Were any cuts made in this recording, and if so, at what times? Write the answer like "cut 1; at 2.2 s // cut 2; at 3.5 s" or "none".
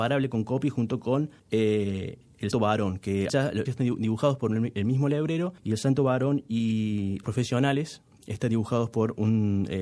cut 1; at 1.4 s // cut 2; at 2.5 s // cut 3; at 3.3 s // cut 4; at 3.7 s // cut 5; at 5.6 s // cut 6; at 7.2 s